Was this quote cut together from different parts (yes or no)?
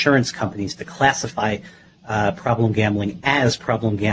no